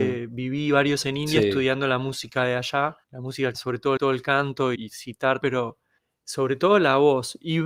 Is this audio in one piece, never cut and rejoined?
no; 7 cuts; at 1.0 s, 3.0 s, 3.5 s, 4.0 s, 4.7 s, 5.4 s, 6.0 s

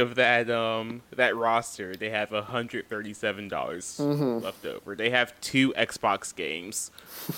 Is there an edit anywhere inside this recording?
no; 0 cuts

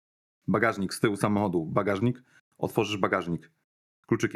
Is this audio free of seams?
yes; 0 cuts

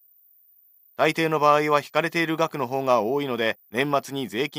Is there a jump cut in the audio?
yes; 1 cut; at 3.7 s

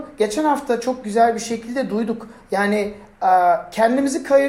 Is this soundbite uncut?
yes; 0 cuts

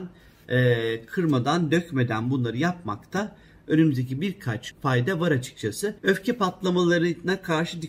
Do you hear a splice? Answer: yes; 2 cuts; at 4.7 s, 6.0 s

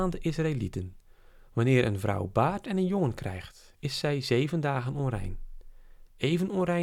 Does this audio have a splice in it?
no; 0 cuts

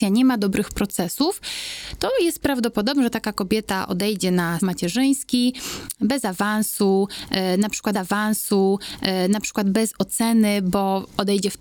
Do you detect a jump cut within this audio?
yes; 2 cuts; at 4.6 s, 7.9 s

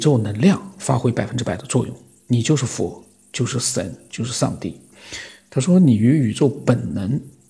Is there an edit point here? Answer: no; 0 cuts

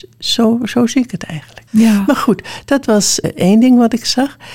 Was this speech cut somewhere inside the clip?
yes; 2 cuts; at 1.7 s, 3.2 s

